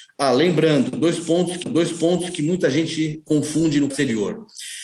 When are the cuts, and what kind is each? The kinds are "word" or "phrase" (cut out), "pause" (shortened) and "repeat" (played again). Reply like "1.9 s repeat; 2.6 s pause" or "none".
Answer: 1.6 s repeat; 3.9 s word